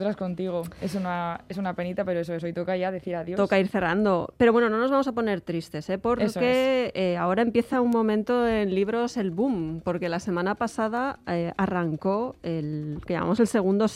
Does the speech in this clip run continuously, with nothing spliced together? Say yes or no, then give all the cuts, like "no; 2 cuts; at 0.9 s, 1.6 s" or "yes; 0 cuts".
yes; 0 cuts